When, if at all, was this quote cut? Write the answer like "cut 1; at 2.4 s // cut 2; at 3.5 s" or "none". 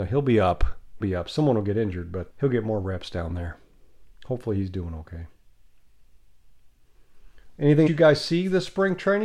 cut 1; at 1.0 s // cut 2; at 2.3 s // cut 3; at 7.9 s